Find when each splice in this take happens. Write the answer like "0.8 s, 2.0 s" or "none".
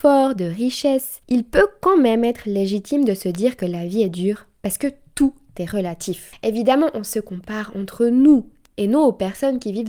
1.2 s